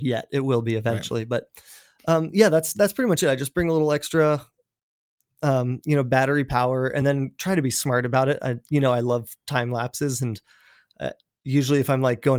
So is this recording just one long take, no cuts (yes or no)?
yes